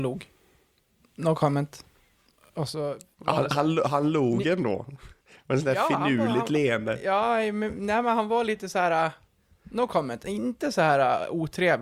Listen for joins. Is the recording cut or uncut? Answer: uncut